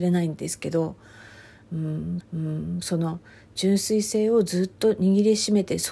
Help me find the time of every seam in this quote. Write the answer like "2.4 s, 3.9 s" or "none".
2.2 s